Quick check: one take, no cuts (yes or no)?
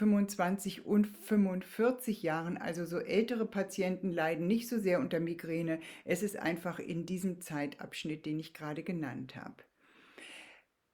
yes